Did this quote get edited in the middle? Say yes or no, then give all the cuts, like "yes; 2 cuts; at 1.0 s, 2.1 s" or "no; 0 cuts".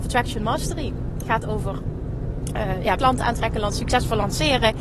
yes; 1 cut; at 3.0 s